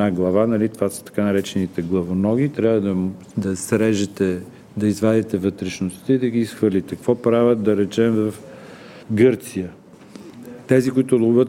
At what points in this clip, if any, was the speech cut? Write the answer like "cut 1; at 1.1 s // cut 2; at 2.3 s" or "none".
cut 1; at 9.0 s